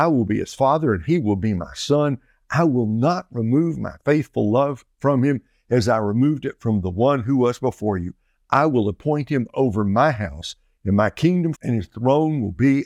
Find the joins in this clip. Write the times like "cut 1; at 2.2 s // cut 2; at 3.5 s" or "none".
cut 1; at 11.5 s